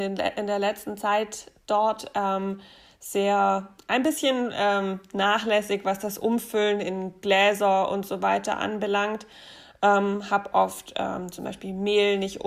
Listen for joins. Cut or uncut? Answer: uncut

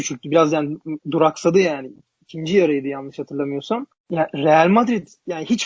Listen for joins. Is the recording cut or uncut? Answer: uncut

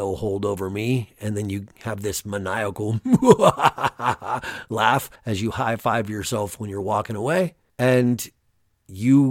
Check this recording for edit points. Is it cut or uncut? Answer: cut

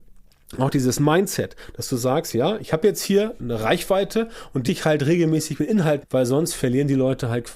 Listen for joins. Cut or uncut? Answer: cut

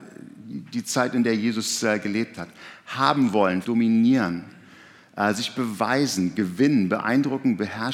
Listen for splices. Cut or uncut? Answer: cut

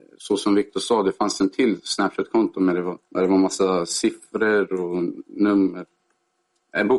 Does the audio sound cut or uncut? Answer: cut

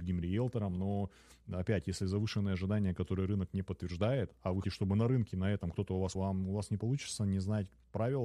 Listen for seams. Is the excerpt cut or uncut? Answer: cut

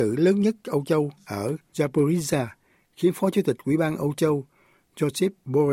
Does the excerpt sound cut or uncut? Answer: uncut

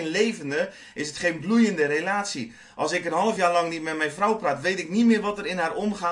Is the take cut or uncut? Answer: uncut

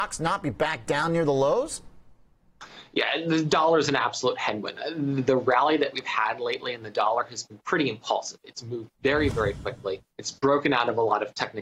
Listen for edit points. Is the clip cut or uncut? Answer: cut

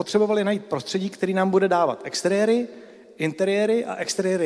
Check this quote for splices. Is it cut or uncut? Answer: uncut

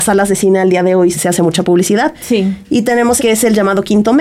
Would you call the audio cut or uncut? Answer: cut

